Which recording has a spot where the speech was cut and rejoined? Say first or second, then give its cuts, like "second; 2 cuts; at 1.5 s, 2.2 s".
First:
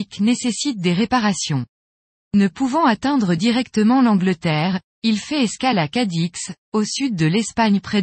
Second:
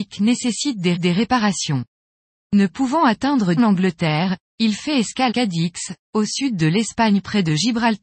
second; 3 cuts; at 0.9 s, 3.6 s, 5.3 s